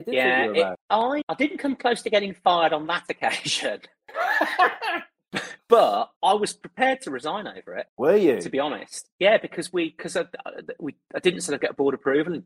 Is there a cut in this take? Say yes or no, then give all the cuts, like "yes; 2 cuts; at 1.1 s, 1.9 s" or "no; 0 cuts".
yes; 1 cut; at 1.2 s